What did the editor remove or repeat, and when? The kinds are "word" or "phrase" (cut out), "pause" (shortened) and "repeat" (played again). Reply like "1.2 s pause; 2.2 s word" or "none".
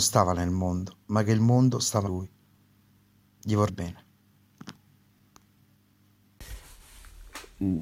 2.1 s word; 3.7 s word